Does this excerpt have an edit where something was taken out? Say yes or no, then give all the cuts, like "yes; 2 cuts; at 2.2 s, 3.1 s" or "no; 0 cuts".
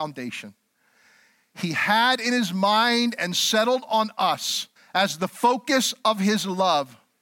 yes; 1 cut; at 4.8 s